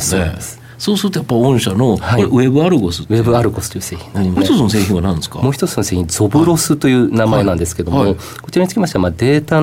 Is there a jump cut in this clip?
yes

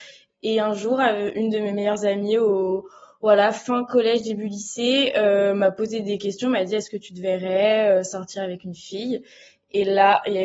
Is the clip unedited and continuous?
yes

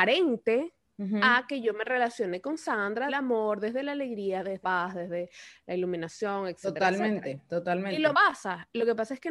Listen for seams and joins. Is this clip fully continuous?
no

